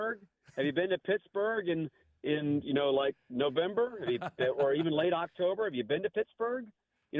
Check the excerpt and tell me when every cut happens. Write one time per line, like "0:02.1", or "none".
none